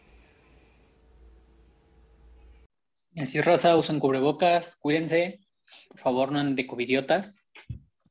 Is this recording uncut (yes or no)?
yes